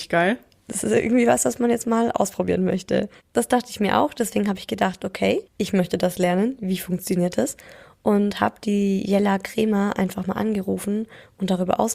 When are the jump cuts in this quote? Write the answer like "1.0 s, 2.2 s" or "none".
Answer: 5.5 s